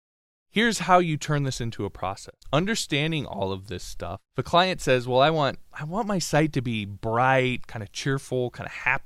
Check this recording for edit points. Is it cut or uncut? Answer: cut